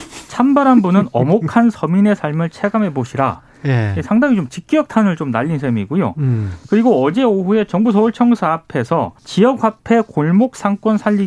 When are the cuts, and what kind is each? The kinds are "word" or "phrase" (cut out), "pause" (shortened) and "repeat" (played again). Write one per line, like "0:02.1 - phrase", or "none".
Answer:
0:09.2 - pause

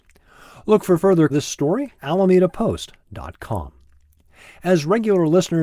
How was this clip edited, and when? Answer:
0:01.3 - phrase
0:02.0 - word

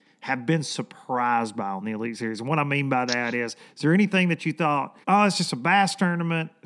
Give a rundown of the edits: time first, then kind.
0:05.0 - pause

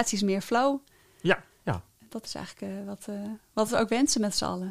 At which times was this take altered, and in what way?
none

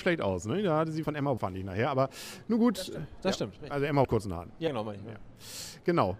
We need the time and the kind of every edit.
0:01.0 - word
0:01.4 - word
0:04.0 - word
0:04.7 - word

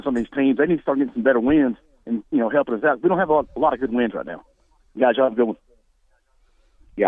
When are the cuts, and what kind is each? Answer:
none

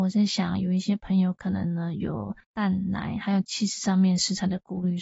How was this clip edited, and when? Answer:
0:02.4 - pause

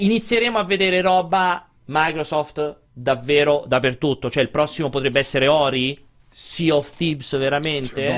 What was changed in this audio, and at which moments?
0:01.8 - pause
0:06.2 - pause

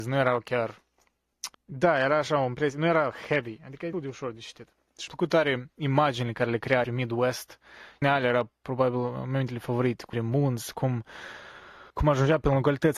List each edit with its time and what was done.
0:01.5 - pause
0:03.9 - word
0:05.1 - word
0:06.8 - word
0:08.0 - phrase
0:08.6 - pause
0:10.1 - phrase
0:11.9 - pause

